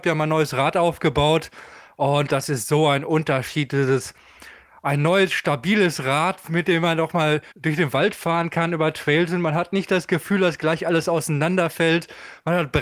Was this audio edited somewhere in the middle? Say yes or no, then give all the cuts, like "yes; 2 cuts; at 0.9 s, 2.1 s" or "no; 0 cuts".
yes; 1 cut; at 7.5 s